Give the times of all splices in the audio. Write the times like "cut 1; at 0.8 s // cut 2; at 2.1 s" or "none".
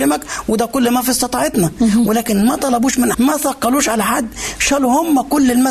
cut 1; at 3.1 s